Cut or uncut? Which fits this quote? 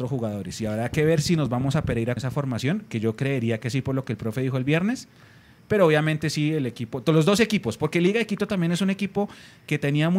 cut